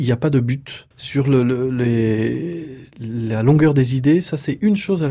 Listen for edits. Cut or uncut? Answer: cut